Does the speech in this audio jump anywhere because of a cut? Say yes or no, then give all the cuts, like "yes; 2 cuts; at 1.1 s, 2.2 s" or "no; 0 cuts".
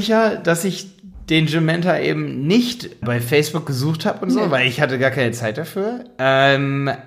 yes; 1 cut; at 3.0 s